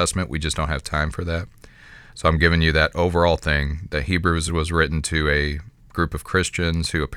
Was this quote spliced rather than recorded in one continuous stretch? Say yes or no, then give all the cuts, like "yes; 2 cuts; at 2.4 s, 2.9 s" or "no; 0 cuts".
no; 0 cuts